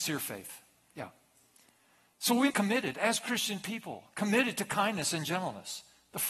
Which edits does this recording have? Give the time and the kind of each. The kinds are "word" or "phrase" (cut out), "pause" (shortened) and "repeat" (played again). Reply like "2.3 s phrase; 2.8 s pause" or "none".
2.5 s phrase